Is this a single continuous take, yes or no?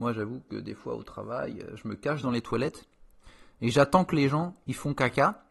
yes